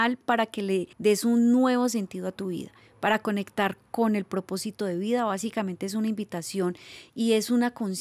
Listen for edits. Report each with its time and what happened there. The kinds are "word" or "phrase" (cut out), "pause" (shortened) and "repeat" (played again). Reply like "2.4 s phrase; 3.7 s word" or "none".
0.9 s pause